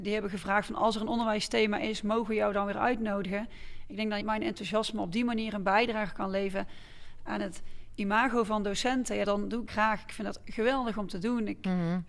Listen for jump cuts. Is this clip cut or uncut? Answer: cut